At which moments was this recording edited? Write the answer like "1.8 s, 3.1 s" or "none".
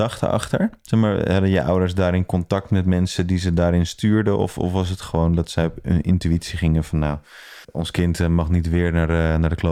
7.6 s